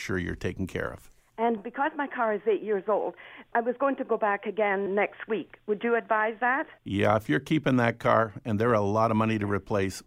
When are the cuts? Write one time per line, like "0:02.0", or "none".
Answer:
0:01.6
0:03.5
0:04.9
0:06.8